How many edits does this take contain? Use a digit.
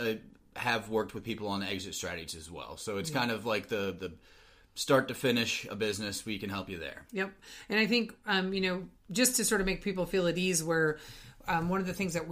0